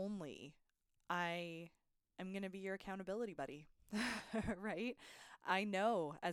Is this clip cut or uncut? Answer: uncut